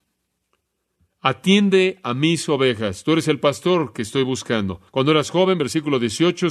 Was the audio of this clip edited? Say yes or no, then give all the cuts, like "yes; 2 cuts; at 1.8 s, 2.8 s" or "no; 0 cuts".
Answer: yes; 1 cut; at 4.9 s